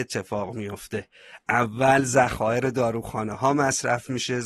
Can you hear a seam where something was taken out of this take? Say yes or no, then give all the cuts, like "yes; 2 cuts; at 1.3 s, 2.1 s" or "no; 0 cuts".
no; 0 cuts